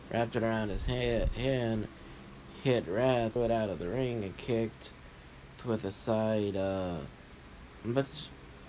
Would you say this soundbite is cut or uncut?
cut